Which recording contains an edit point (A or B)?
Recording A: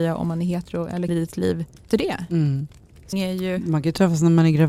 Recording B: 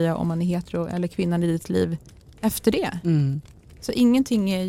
A